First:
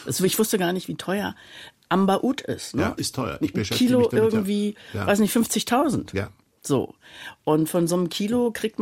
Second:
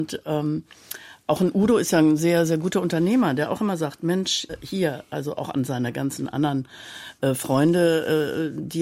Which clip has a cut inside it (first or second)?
first